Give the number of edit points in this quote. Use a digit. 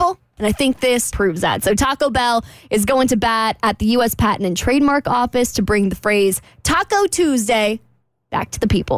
1